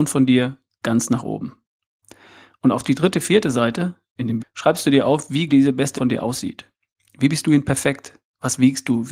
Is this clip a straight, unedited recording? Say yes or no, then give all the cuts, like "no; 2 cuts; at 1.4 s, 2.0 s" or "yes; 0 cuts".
no; 3 cuts; at 4.4 s, 5.5 s, 5.9 s